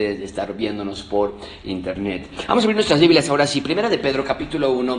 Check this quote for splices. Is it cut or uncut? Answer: uncut